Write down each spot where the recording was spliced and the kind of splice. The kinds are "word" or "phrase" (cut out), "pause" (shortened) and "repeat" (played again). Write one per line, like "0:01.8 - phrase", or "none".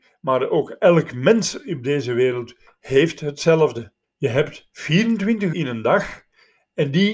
0:04.0 - pause
0:05.5 - word